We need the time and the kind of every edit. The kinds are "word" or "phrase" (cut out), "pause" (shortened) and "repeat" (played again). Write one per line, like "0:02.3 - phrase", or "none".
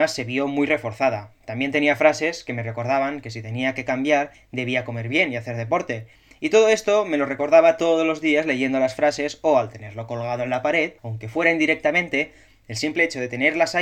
0:11.0 - pause

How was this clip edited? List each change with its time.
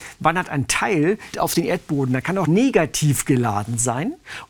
0:01.3 - phrase
0:02.5 - phrase

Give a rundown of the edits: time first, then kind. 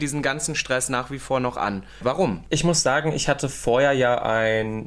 none

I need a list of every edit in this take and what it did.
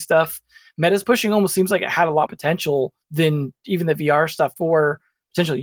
0:02.3 - word
0:03.0 - pause
0:04.6 - word

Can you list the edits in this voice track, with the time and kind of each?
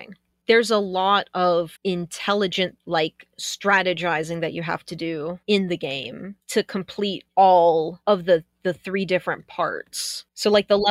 0:01.7 - pause
0:05.4 - pause
0:08.0 - pause

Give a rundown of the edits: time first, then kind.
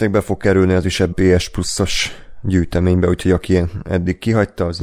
0:01.1 - word

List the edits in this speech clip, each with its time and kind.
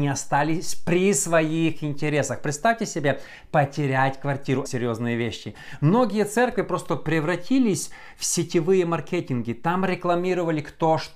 0:04.7 - phrase

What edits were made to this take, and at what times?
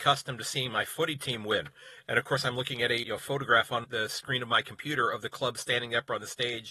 0:03.0 - word
0:03.8 - word

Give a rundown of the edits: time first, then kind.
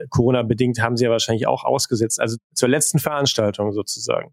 none

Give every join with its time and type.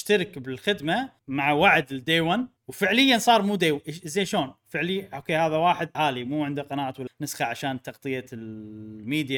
0:01.2 - pause
0:02.6 - pause
0:05.9 - word
0:07.1 - word

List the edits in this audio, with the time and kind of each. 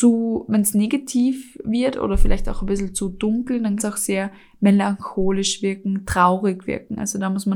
0:03.8 - word

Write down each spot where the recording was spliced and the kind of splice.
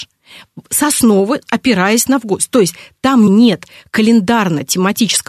0:03.3 - word

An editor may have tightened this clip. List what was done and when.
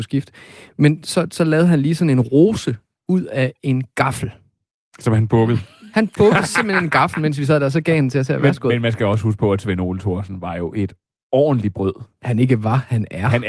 none

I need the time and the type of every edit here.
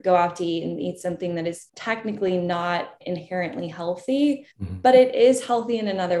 0:01.7 - pause
0:04.5 - pause

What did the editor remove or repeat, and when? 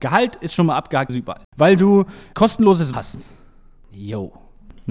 0:01.1 - word
0:01.5 - pause
0:02.9 - word

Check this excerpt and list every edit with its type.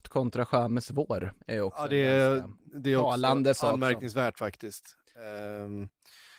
0:01.4 - pause

